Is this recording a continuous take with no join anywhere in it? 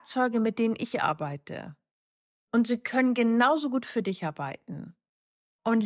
yes; 0 cuts

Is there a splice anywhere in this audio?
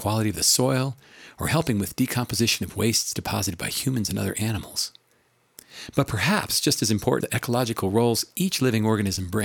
yes; 1 cut; at 7.2 s

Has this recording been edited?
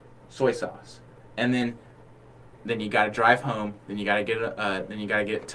no; 0 cuts

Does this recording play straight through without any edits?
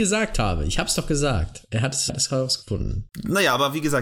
no; 1 cut; at 2.1 s

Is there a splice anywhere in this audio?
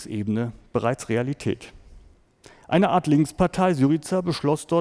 no; 0 cuts

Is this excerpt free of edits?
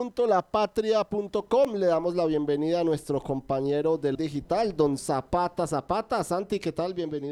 no; 2 cuts; at 4.1 s, 5.0 s

